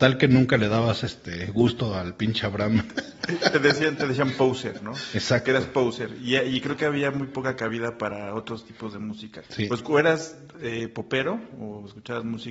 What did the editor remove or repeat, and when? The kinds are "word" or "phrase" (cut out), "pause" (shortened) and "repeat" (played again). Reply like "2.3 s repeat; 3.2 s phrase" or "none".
none

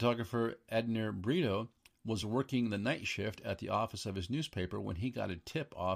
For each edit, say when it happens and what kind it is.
none

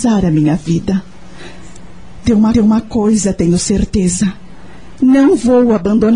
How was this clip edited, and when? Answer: 2.5 s repeat

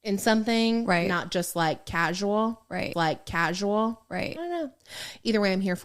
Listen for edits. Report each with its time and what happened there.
2.9 s repeat

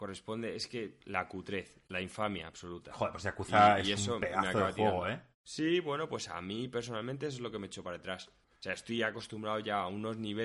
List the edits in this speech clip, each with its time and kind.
5.3 s pause

